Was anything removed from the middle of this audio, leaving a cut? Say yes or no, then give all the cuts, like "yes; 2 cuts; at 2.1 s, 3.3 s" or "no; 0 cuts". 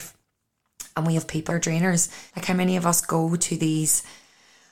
yes; 3 cuts; at 1.2 s, 1.5 s, 2.3 s